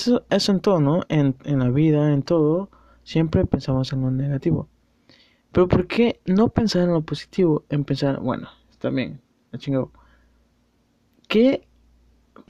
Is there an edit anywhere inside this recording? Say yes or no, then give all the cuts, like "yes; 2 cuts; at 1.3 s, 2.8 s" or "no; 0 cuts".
no; 0 cuts